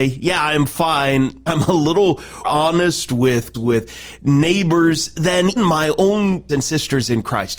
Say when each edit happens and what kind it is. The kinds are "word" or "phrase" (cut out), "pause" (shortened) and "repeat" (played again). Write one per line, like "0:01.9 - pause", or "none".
0:01.5 - word
0:02.4 - word
0:03.5 - word
0:05.6 - word
0:06.5 - word